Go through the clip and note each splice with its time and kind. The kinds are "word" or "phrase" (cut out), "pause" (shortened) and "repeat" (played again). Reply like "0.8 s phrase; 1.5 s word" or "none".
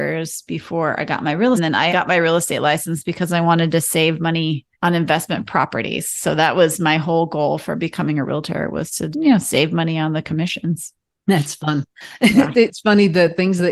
1.6 s phrase; 1.9 s word; 4.7 s pause; 9.1 s word; 11.1 s pause